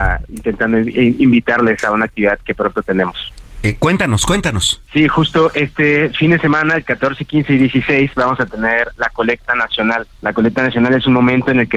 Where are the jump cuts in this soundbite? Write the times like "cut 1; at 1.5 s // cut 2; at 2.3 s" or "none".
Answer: cut 1; at 4.8 s // cut 2; at 10.1 s